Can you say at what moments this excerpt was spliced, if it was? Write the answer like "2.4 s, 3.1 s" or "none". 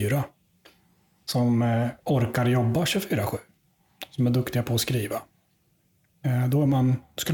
none